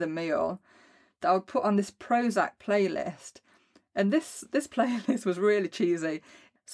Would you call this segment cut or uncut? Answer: uncut